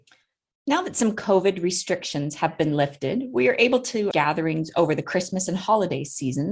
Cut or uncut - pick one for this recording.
cut